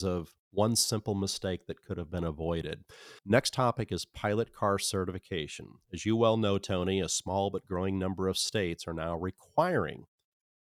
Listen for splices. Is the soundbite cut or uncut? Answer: cut